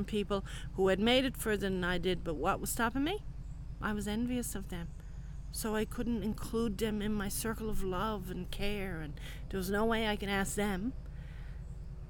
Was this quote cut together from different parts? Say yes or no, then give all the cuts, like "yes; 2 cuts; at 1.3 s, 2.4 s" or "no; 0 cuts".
no; 0 cuts